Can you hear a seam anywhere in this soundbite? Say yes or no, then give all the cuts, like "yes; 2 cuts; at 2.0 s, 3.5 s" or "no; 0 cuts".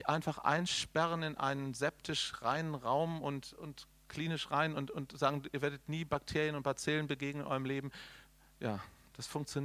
no; 0 cuts